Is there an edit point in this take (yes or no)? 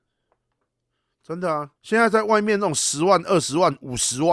yes